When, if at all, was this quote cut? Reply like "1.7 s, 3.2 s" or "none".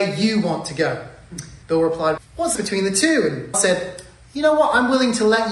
1.6 s, 2.2 s, 2.5 s, 3.5 s